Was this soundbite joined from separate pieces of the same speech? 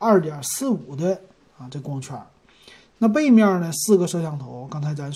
no; 0 cuts

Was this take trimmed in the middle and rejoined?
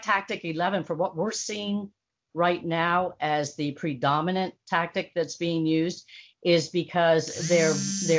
no; 0 cuts

